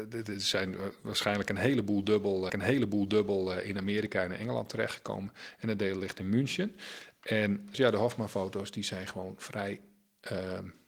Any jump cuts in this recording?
yes; 2 cuts; at 2.5 s, 7.7 s

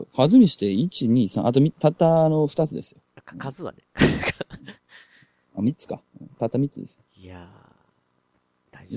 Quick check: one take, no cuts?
no; 1 cut; at 7.1 s

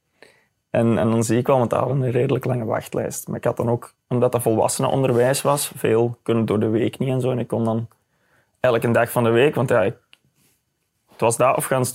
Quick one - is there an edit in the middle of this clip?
no; 0 cuts

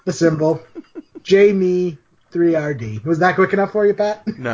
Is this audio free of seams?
yes; 0 cuts

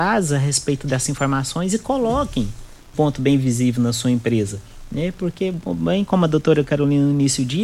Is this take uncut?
no; 1 cut; at 2.9 s

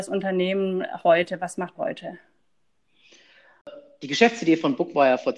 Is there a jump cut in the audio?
yes; 1 cut; at 1.7 s

